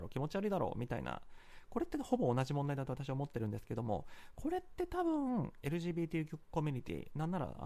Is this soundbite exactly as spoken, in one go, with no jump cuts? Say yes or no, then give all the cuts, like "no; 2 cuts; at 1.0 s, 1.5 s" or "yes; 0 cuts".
yes; 0 cuts